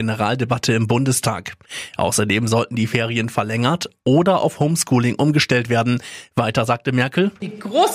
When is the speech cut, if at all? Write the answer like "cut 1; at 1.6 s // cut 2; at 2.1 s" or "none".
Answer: none